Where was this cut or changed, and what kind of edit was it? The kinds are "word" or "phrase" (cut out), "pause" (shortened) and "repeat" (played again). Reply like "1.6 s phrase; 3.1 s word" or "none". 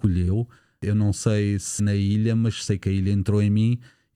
1.8 s word